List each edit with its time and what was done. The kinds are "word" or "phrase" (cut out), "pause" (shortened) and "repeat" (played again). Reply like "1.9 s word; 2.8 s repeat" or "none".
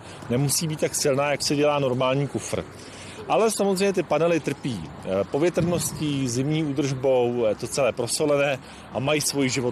1.4 s word